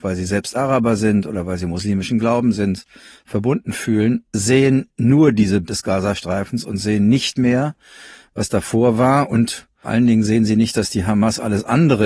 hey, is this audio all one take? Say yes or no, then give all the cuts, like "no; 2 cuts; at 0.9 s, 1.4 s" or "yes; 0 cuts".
no; 2 cuts; at 5.6 s, 9.8 s